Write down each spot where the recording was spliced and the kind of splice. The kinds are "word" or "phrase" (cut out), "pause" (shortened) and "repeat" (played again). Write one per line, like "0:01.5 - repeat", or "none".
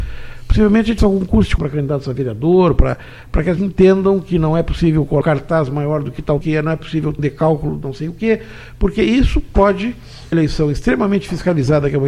0:01.0 - word
0:01.6 - word
0:03.6 - word
0:05.2 - word
0:06.4 - word
0:07.2 - word
0:10.3 - word